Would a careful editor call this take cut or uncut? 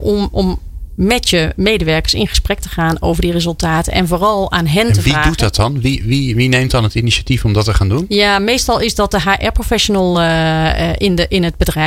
uncut